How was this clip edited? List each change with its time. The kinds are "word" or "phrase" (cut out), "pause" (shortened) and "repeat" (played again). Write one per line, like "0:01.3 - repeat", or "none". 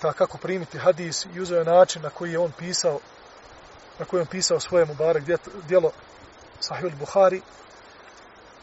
none